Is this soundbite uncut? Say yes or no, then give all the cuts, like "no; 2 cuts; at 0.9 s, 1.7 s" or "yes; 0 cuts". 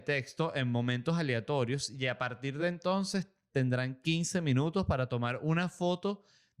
yes; 0 cuts